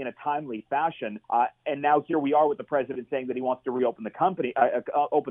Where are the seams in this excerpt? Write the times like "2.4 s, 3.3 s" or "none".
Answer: 1.2 s